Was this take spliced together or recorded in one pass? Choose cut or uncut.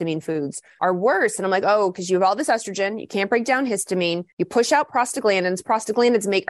cut